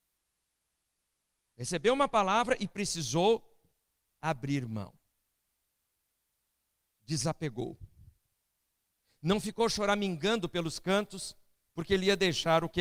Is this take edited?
no; 0 cuts

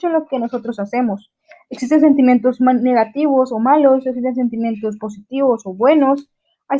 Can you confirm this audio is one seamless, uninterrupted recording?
yes; 0 cuts

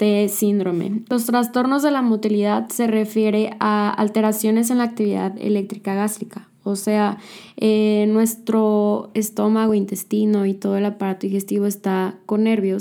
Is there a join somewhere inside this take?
no; 0 cuts

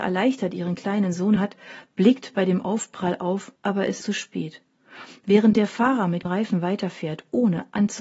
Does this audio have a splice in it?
yes; 4 cuts; at 1.4 s, 3.6 s, 4.0 s, 6.3 s

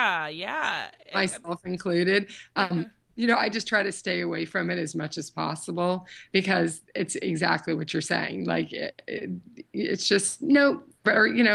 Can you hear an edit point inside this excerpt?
no; 0 cuts

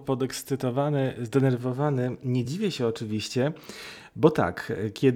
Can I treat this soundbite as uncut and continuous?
yes; 0 cuts

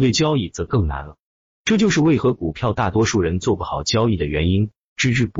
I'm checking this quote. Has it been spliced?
no; 0 cuts

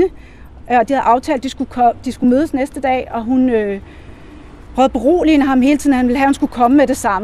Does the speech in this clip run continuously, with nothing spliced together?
yes; 0 cuts

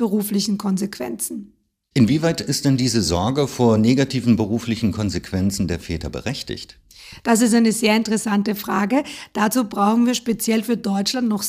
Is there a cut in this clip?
no; 0 cuts

